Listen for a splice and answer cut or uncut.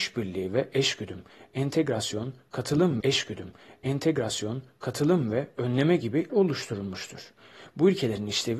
cut